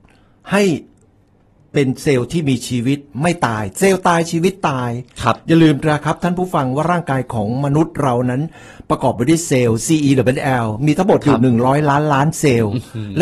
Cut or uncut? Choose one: uncut